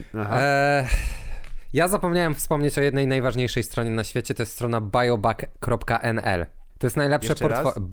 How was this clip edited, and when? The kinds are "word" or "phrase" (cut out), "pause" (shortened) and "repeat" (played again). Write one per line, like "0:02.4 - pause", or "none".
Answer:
0:06.7 - pause